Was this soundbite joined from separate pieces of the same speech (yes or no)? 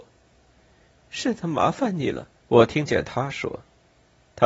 yes